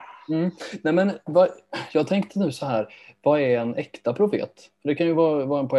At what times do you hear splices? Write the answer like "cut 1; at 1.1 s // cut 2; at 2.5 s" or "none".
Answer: none